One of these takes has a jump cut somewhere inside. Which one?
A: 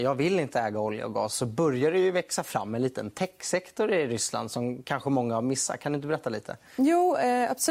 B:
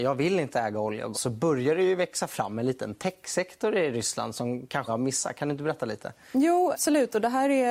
B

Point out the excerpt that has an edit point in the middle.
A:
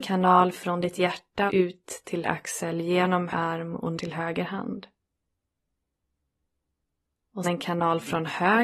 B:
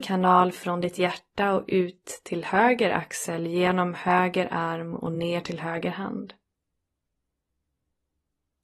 A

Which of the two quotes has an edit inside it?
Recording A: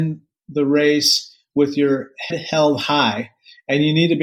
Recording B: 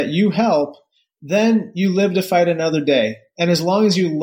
A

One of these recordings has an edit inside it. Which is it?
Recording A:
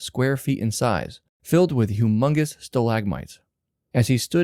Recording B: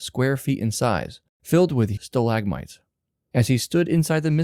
B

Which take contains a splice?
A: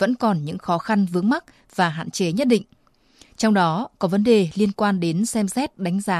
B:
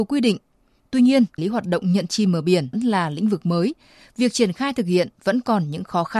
B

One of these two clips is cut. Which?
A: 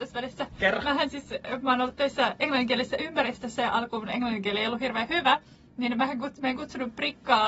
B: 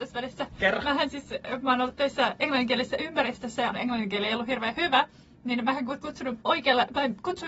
B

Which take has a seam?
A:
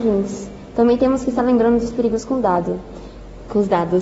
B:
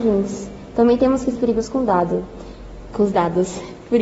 B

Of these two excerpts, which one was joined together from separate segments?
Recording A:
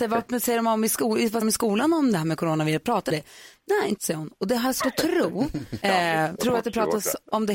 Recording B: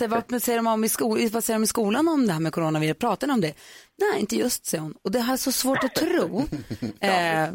A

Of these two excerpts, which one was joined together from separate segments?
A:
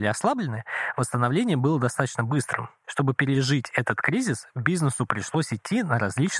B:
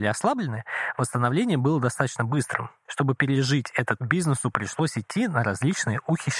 B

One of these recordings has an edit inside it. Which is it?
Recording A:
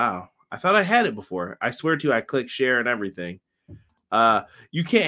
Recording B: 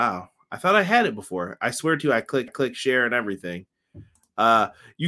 B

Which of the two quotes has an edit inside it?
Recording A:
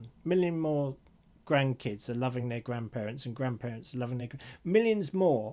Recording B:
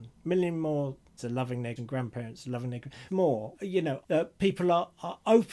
B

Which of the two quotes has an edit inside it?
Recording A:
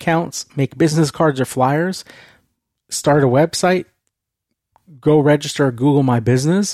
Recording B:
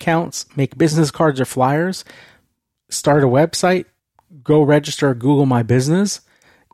B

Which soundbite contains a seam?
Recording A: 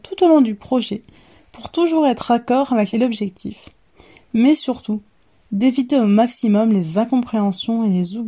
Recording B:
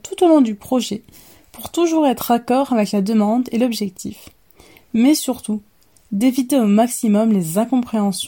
A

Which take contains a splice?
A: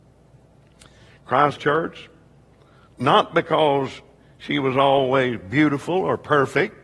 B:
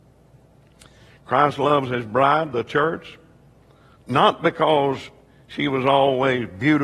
A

